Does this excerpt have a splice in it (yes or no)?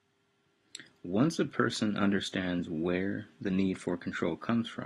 no